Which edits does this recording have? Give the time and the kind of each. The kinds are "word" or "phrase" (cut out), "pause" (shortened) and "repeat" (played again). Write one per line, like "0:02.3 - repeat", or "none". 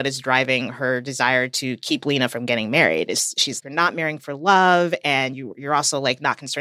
0:03.6 - word